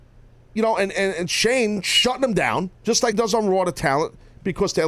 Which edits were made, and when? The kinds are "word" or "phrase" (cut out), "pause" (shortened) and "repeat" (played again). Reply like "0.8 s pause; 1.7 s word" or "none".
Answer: 0.9 s word; 2.8 s pause; 3.1 s word